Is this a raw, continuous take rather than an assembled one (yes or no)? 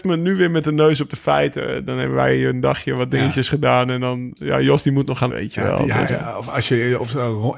no